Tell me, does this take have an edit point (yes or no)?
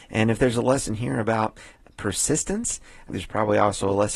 yes